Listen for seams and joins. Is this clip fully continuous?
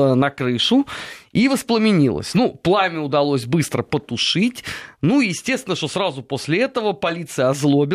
yes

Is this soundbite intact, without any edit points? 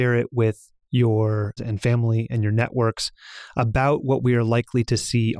no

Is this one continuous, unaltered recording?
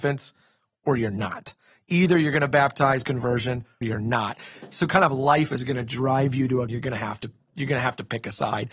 no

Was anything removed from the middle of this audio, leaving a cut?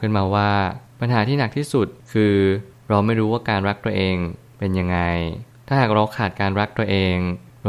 no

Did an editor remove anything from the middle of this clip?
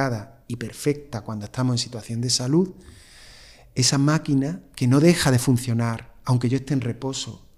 no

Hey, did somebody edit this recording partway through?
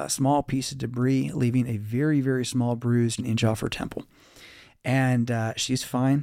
yes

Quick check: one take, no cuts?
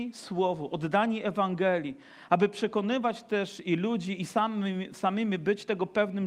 yes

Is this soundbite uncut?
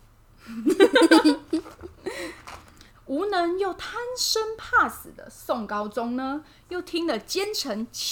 no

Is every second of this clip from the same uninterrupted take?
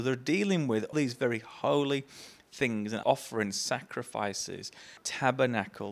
no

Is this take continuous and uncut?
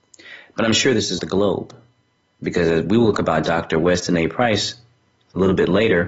no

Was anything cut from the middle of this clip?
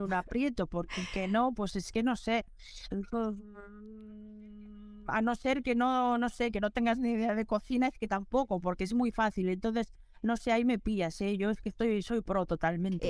no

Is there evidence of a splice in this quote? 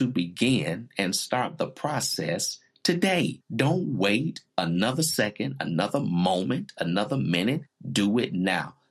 yes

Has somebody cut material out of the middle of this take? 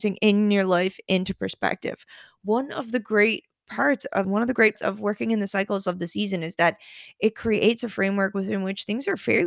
yes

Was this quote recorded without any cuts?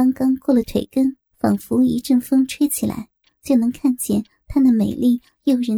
no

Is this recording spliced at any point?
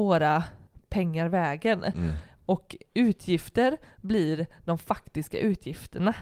no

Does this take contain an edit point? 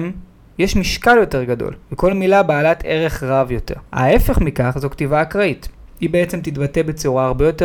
yes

